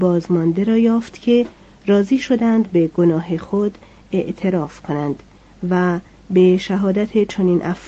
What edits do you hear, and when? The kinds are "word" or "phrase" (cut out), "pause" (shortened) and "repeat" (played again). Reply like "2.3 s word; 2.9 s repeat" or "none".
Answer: none